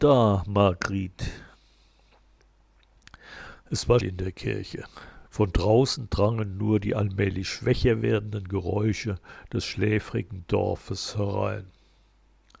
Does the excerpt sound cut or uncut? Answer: cut